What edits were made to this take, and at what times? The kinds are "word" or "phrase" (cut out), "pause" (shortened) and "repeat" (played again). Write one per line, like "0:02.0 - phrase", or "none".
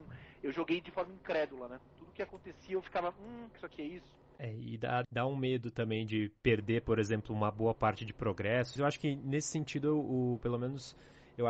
0:03.5 - word
0:05.0 - word
0:08.8 - word